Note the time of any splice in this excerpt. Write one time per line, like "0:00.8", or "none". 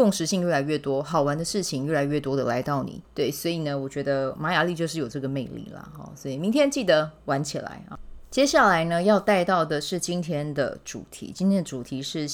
0:03.0